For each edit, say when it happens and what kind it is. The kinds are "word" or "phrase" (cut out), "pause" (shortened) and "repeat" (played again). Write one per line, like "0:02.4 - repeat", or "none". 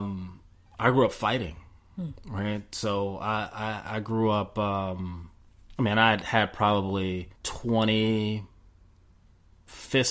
0:05.7 - pause
0:07.3 - pause